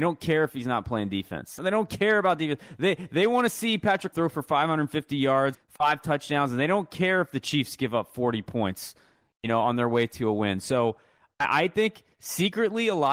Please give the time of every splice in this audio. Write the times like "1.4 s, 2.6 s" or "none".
1.6 s, 4.1 s, 5.5 s